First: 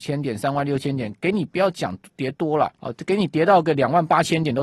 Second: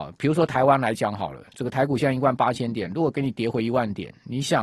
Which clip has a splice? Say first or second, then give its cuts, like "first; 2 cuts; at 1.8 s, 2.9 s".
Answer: first; 1 cut; at 2.7 s